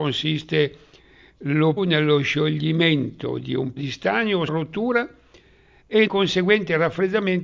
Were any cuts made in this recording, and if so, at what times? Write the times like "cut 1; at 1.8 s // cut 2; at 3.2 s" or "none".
cut 1; at 1.8 s // cut 2; at 3.8 s // cut 3; at 4.5 s // cut 4; at 6.1 s